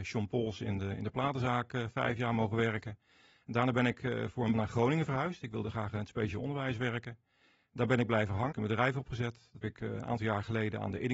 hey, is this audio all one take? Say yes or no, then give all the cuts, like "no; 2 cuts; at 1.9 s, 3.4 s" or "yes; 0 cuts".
no; 3 cuts; at 4.5 s, 8.5 s, 9.6 s